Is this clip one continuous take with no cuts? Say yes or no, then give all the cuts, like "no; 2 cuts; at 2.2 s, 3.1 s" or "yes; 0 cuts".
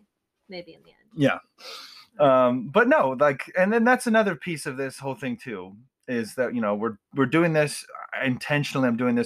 yes; 0 cuts